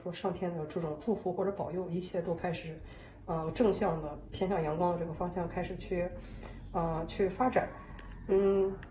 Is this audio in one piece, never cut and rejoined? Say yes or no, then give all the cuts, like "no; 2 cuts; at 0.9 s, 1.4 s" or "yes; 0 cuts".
yes; 0 cuts